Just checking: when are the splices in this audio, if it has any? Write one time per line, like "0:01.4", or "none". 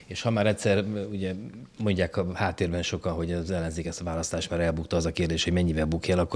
none